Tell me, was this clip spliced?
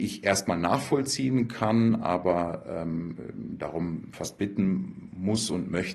no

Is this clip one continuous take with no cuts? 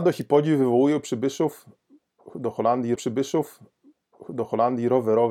no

